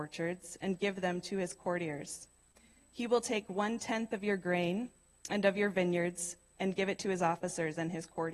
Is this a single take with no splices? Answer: yes; 0 cuts

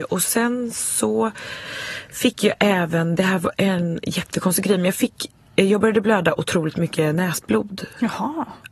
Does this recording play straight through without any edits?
yes; 0 cuts

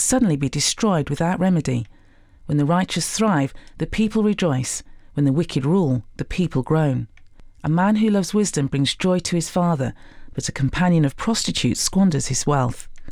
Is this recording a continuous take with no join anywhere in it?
yes; 0 cuts

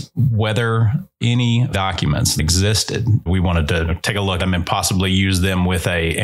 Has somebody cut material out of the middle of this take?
yes; 4 cuts; at 1.7 s, 3.3 s, 3.9 s, 4.4 s

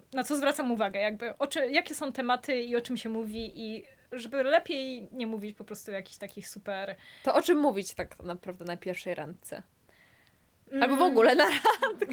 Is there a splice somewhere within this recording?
no; 0 cuts

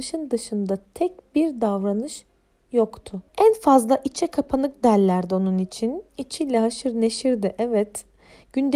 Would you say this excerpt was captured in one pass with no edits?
no; 2 cuts; at 3.3 s, 6.1 s

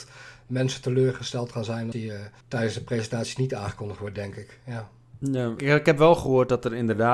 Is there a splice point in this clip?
yes; 3 cuts; at 1.9 s, 2.4 s, 5.6 s

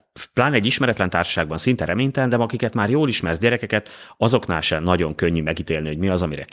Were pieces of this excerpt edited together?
no; 0 cuts

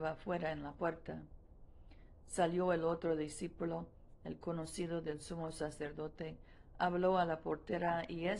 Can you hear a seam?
no; 0 cuts

